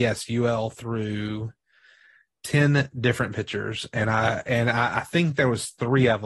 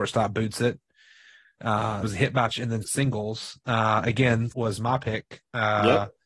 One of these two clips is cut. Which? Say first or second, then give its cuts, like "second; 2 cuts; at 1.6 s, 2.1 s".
second; 4 cuts; at 2.0 s, 2.5 s, 2.8 s, 4.5 s